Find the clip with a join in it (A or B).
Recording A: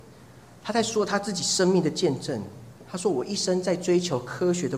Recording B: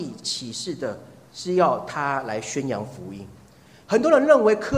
B